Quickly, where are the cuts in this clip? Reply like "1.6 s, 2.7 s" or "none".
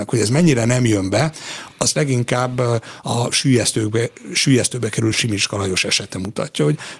none